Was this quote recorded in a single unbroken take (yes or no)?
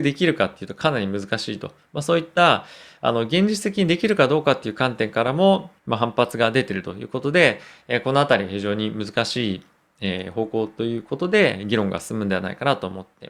no